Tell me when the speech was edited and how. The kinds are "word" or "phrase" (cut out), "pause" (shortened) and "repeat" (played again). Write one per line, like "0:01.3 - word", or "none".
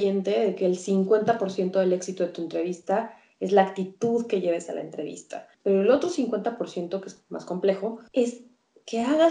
0:05.5 - pause
0:08.1 - pause